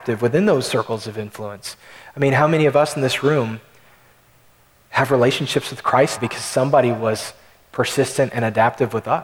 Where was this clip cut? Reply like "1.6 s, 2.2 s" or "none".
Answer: 6.2 s